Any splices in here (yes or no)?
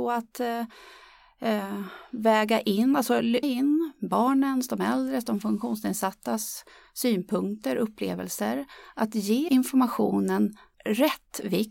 yes